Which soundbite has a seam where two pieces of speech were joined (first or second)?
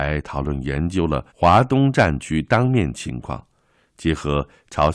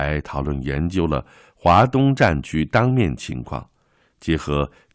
first